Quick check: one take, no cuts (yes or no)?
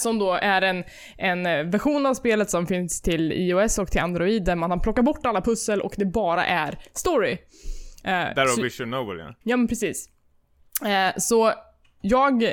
no